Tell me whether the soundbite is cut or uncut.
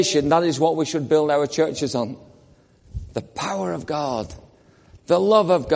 uncut